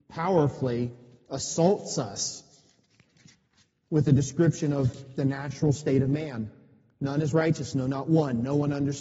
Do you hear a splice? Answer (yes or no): no